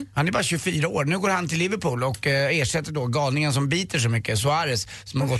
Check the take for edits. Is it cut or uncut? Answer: uncut